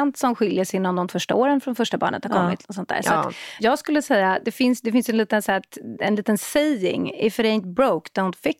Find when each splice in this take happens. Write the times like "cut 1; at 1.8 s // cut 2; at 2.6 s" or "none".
cut 1; at 1.1 s // cut 2; at 3.6 s